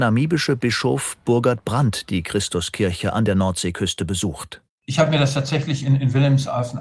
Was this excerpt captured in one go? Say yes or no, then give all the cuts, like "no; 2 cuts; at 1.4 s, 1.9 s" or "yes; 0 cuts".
no; 1 cut; at 4.7 s